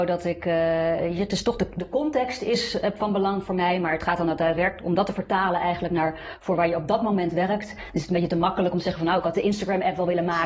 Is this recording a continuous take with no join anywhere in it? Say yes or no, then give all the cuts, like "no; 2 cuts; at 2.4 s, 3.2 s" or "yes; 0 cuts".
yes; 0 cuts